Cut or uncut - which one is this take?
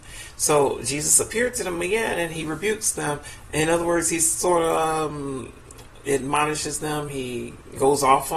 uncut